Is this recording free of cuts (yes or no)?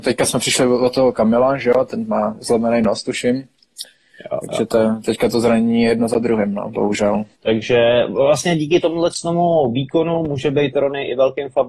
no